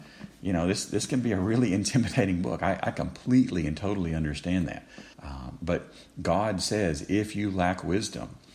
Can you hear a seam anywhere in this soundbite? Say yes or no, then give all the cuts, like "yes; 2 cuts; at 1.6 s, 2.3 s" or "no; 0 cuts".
yes; 1 cut; at 5.1 s